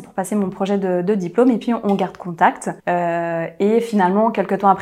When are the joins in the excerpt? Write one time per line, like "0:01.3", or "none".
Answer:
0:02.8